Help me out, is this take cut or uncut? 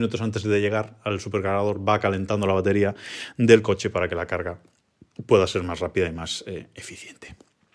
uncut